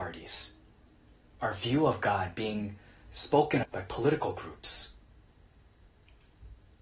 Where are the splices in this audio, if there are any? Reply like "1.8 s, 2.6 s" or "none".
3.6 s